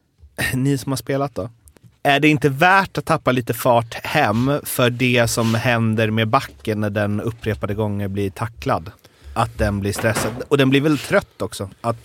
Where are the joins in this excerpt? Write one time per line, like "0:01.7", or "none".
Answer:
0:01.8